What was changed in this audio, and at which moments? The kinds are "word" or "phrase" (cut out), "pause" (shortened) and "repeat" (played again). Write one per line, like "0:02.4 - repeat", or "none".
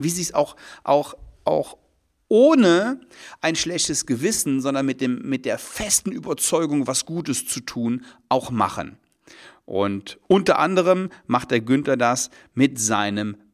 none